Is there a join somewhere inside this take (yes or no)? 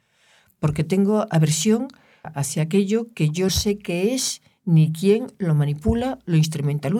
yes